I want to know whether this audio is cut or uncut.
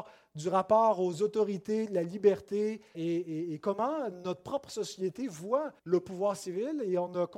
cut